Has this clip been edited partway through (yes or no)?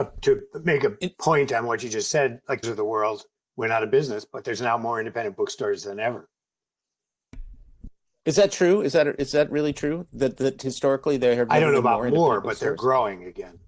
yes